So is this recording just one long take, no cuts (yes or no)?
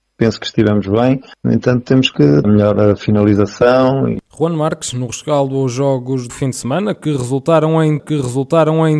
no